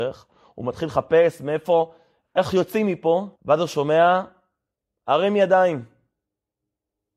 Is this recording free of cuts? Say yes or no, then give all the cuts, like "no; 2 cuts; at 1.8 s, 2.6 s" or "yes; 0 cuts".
no; 1 cut; at 3.4 s